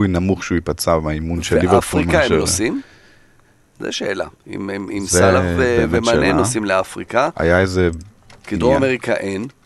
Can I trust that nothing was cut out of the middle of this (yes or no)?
yes